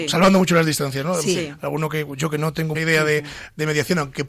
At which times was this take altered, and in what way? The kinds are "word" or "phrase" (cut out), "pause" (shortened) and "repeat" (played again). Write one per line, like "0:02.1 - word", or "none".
0:02.7 - word